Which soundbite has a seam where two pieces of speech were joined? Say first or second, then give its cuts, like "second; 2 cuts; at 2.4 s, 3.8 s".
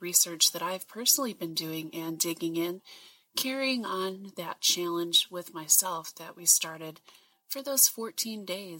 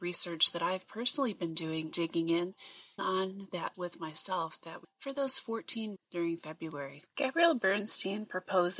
second; 5 cuts; at 1.9 s, 3.0 s, 3.7 s, 4.8 s, 6.0 s